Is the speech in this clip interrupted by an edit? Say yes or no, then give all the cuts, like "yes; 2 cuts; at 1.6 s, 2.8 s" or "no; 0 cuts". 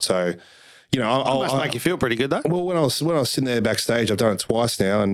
no; 0 cuts